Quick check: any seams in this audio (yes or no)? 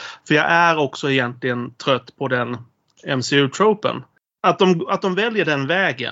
no